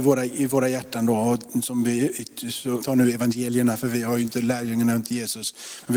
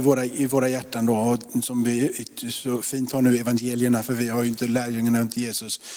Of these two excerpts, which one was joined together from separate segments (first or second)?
first